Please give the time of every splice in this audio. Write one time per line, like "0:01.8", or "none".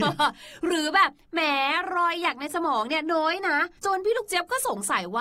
0:03.8

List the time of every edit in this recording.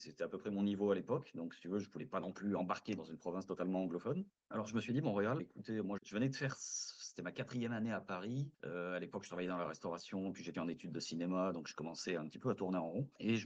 0:03.0
0:05.4
0:06.0
0:10.5
0:12.2

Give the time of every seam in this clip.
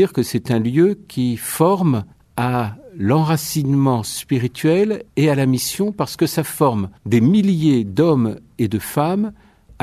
0:02.1
0:05.1
0:07.0

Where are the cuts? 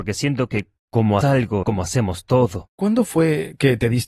0:01.2
0:01.6

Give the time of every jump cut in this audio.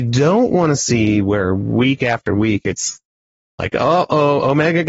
none

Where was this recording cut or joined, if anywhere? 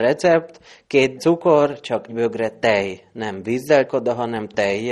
0:01.2
0:02.1
0:03.9

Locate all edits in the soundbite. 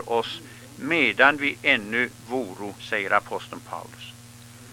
0:02.8

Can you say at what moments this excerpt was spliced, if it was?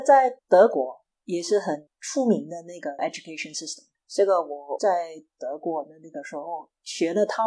0:03.0
0:03.9

